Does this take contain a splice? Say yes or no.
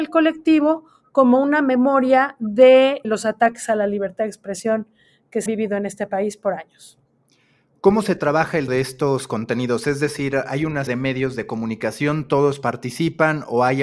yes